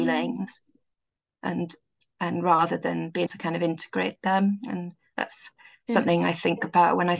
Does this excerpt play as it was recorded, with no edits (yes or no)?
no